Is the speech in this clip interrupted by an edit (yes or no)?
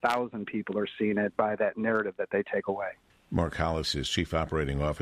no